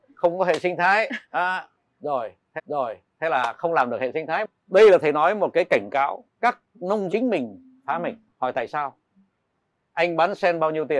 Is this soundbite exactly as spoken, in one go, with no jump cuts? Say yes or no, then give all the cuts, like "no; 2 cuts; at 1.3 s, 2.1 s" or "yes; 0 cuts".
no; 5 cuts; at 1.2 s, 2.6 s, 6.3 s, 7.1 s, 8.3 s